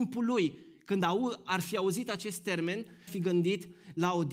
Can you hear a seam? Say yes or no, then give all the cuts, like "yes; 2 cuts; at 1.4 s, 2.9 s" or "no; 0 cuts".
yes; 1 cut; at 3.1 s